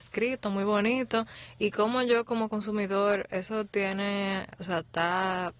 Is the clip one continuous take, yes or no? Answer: yes